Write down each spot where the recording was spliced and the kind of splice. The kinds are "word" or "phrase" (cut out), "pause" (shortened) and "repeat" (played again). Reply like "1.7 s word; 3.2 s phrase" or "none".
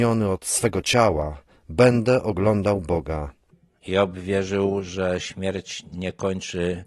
none